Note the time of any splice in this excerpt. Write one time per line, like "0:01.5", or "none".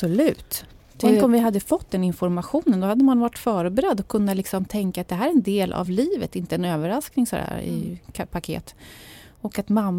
none